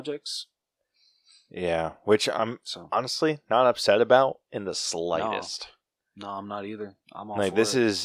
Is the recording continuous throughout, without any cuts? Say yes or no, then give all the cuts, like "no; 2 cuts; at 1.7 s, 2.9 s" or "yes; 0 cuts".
yes; 0 cuts